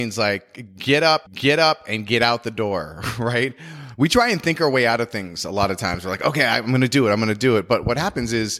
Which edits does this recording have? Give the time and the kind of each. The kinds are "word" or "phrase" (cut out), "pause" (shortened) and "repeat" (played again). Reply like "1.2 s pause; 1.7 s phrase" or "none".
1.3 s repeat